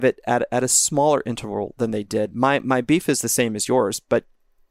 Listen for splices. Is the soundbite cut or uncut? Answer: uncut